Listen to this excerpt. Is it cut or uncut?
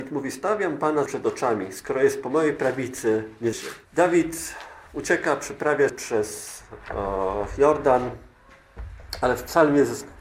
cut